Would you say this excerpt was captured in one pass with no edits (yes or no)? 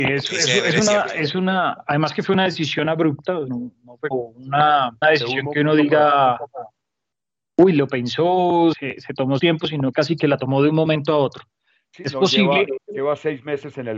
no